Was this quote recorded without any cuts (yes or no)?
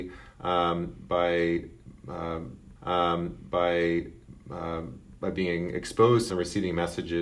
no